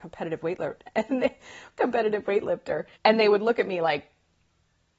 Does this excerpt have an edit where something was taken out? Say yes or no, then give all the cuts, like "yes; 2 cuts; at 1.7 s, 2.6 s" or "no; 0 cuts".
yes; 1 cut; at 3.0 s